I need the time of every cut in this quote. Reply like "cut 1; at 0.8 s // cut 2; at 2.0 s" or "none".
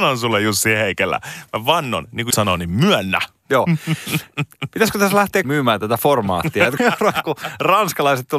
cut 1; at 2.3 s // cut 2; at 5.4 s // cut 3; at 6.8 s // cut 4; at 7.2 s

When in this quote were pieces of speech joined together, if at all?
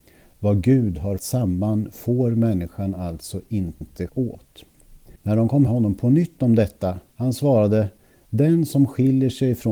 cut 1; at 1.2 s // cut 2; at 4.1 s // cut 3; at 5.2 s // cut 4; at 5.7 s // cut 5; at 7.1 s

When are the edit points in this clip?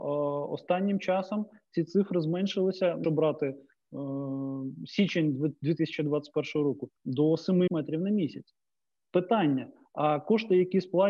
cut 1; at 3.0 s // cut 2; at 7.0 s // cut 3; at 7.7 s

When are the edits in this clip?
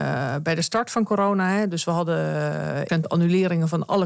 cut 1; at 2.9 s

